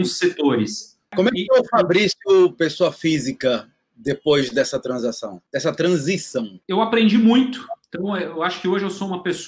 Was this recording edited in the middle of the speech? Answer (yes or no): yes